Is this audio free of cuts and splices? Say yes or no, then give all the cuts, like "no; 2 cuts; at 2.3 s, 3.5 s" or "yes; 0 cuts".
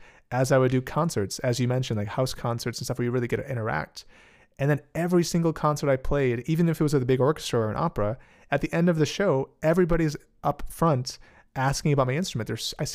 yes; 0 cuts